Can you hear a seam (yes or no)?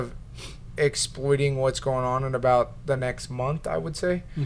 no